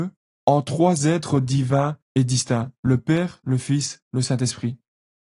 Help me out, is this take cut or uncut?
cut